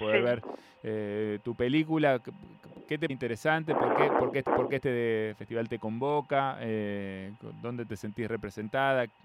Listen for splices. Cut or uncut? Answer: cut